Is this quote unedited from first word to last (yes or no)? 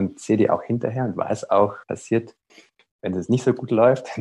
no